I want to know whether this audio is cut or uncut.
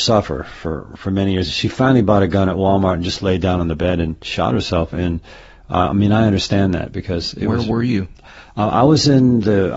uncut